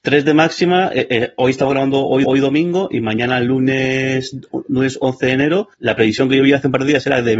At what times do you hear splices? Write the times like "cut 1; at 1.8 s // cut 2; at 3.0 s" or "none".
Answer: cut 1; at 2.2 s // cut 2; at 5.7 s